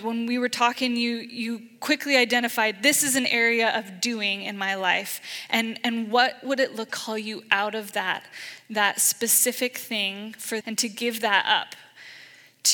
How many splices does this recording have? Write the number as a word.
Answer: two